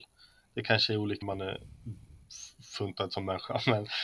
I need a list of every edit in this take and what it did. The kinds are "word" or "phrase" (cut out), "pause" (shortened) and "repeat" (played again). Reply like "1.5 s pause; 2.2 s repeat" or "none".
1.2 s word